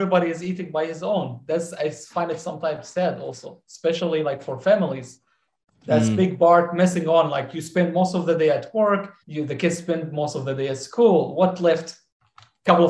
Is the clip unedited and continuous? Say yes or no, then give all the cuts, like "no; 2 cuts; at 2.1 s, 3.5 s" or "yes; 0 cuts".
no; 2 cuts; at 5.5 s, 9.2 s